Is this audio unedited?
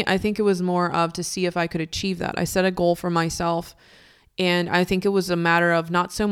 yes; 0 cuts

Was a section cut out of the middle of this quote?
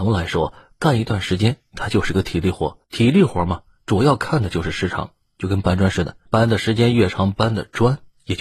yes; 2 cuts; at 2.8 s, 6.3 s

